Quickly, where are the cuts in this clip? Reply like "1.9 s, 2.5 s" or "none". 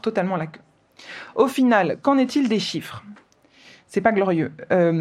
none